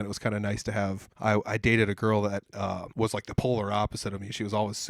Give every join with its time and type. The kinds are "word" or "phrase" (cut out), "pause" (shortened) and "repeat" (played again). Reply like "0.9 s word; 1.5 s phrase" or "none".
1.1 s pause; 2.9 s pause